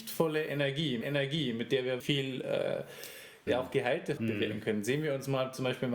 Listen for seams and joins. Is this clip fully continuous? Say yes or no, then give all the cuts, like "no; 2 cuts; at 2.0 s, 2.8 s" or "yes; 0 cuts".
no; 4 cuts; at 1.0 s, 2.0 s, 3.5 s, 4.2 s